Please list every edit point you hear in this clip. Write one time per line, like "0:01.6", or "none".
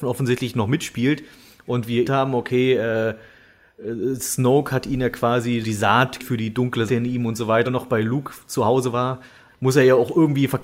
0:02.0
0:05.6
0:06.2
0:06.9
0:07.6
0:09.5